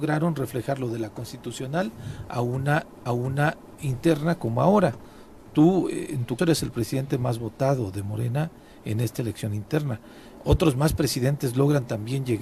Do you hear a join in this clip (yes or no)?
yes